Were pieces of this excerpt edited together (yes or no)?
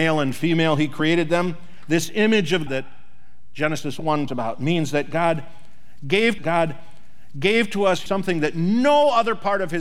yes